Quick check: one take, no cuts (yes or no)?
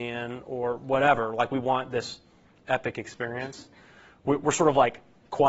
yes